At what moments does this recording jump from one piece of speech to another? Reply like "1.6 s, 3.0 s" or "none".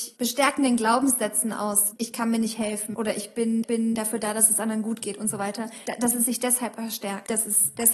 3.6 s